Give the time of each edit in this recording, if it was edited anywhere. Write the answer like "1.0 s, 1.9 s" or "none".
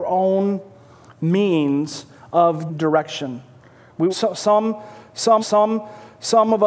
2.7 s, 4.1 s, 5.4 s

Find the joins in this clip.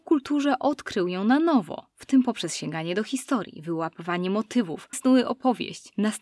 4.9 s

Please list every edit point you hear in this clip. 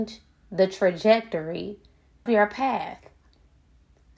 2.3 s

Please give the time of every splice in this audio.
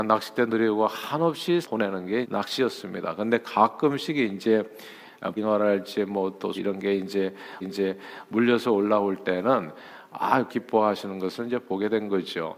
1.6 s, 2.2 s, 5.4 s, 6.5 s, 7.6 s, 10.5 s

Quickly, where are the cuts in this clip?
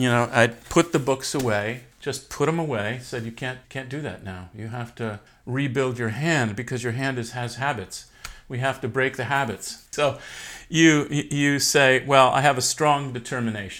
1.9 s, 3.6 s, 5.3 s, 9.9 s

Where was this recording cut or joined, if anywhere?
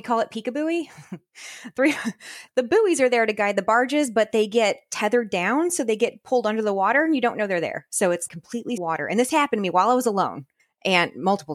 2.5 s, 8.3 s, 8.8 s, 10.6 s

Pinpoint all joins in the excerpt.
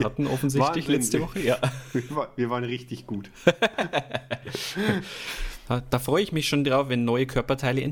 none

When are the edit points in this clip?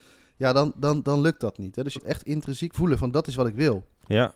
2.0 s, 2.7 s

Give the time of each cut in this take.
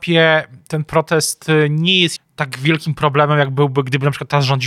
2.2 s

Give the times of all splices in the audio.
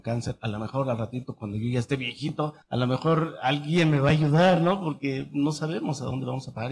2.6 s

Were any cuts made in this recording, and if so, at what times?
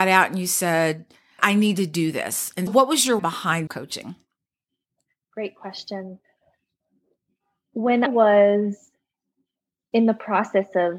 1.4 s, 2.7 s, 3.2 s, 3.7 s, 8.1 s

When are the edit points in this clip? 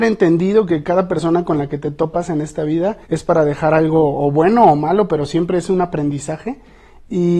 3.0 s

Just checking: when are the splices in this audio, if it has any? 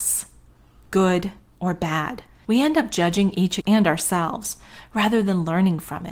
2.3 s, 3.6 s

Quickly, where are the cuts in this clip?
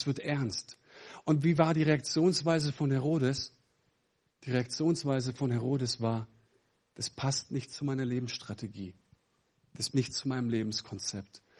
9.9 s

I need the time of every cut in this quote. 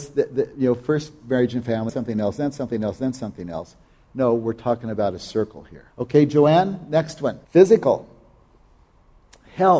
1.9 s, 5.9 s, 7.4 s

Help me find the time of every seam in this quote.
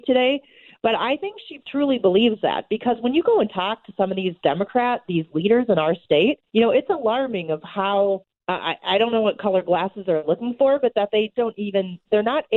1.6 s, 6.5 s, 8.4 s, 11.3 s

